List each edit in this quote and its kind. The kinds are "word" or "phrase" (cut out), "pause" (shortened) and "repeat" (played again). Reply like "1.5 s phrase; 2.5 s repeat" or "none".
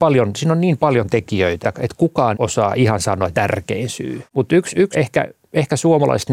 1.6 s word; 2.3 s phrase; 3.3 s phrase; 4.3 s pause; 4.9 s word